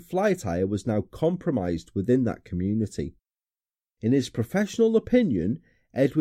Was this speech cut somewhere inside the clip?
no; 0 cuts

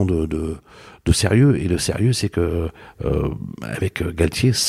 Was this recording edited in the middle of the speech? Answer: no; 0 cuts

